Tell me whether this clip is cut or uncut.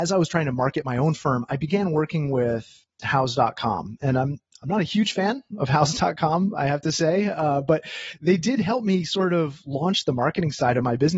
uncut